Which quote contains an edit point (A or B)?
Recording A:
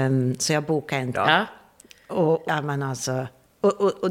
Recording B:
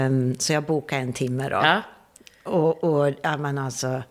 A